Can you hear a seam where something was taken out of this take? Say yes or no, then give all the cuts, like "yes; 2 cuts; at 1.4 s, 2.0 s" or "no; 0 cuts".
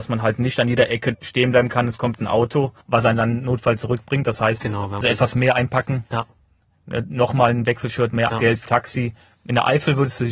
yes; 6 cuts; at 1.1 s, 2.8 s, 5.0 s, 6.1 s, 8.3 s, 8.7 s